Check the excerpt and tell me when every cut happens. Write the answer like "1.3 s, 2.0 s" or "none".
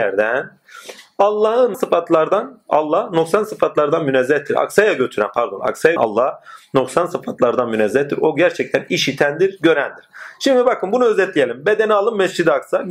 1.7 s, 6.0 s